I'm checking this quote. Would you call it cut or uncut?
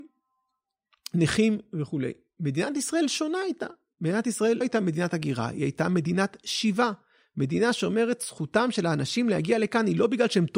cut